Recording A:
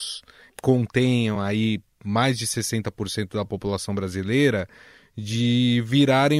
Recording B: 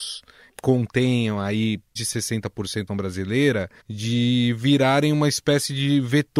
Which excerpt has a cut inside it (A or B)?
B